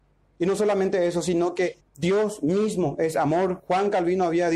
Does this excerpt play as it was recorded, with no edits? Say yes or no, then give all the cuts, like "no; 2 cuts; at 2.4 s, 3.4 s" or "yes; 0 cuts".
no; 1 cut; at 1.8 s